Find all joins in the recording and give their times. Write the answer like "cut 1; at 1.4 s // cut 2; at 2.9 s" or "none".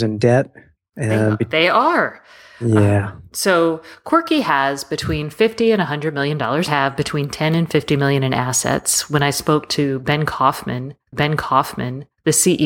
cut 1; at 6.7 s // cut 2; at 11.1 s

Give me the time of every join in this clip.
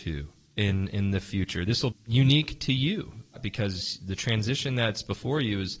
cut 1; at 1.9 s // cut 2; at 3.3 s

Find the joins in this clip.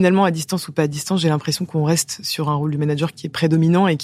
none

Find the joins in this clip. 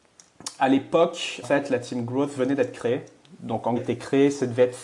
cut 1; at 1.4 s // cut 2; at 3.8 s

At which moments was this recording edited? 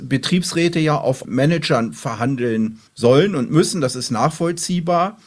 cut 1; at 1.2 s // cut 2; at 2.9 s

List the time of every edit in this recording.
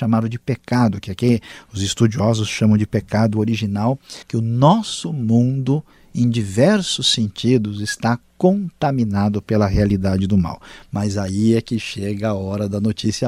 cut 1; at 4.2 s

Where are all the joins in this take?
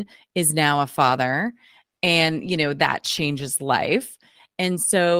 none

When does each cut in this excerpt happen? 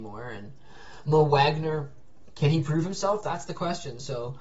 none

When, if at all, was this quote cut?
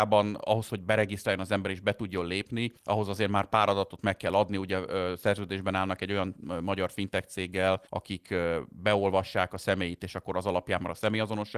cut 1; at 2.8 s // cut 2; at 7.9 s

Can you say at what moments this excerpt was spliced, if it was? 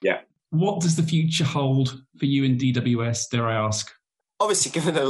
none

